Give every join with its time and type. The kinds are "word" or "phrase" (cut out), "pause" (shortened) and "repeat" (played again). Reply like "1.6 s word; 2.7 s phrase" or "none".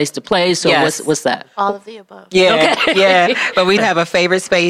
3.8 s word